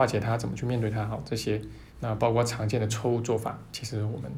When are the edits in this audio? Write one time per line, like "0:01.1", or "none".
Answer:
0:01.9